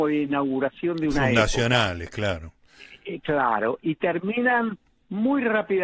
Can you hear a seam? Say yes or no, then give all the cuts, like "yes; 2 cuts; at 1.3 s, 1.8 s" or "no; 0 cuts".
no; 0 cuts